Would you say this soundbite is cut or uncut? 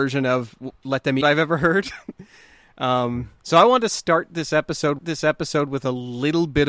cut